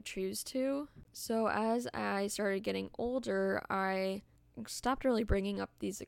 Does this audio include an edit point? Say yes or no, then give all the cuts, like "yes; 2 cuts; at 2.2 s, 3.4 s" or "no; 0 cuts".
no; 0 cuts